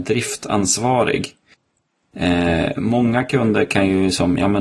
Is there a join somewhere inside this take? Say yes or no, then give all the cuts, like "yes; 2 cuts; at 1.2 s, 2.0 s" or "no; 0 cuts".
no; 0 cuts